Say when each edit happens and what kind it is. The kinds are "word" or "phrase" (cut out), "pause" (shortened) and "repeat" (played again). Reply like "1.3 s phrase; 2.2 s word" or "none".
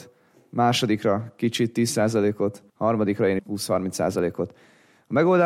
2.7 s pause; 3.4 s phrase